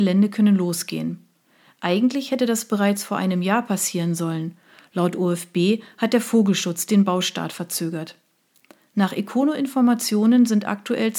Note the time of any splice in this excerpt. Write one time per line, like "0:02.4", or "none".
none